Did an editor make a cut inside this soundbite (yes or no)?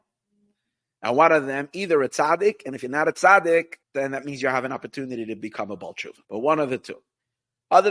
yes